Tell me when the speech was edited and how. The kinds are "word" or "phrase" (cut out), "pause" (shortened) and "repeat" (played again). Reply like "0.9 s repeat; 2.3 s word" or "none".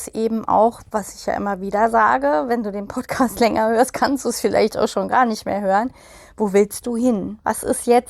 none